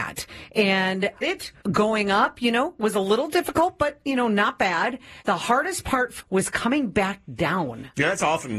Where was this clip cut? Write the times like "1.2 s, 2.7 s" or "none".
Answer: 1.2 s, 1.6 s, 5.2 s, 6.2 s